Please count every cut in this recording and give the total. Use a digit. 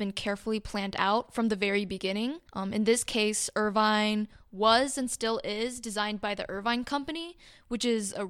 1